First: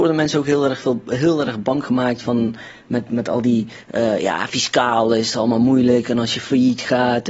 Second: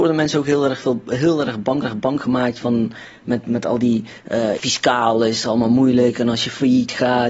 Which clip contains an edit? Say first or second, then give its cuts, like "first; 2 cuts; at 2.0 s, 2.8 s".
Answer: second; 2 cuts; at 1.8 s, 4.6 s